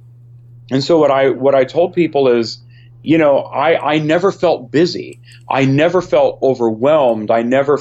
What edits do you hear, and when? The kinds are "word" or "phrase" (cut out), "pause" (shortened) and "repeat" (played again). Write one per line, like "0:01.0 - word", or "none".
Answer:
none